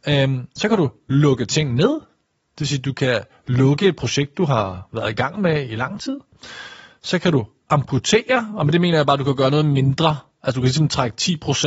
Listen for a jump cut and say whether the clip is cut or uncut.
uncut